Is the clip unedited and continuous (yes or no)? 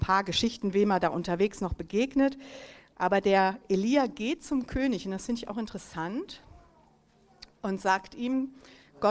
yes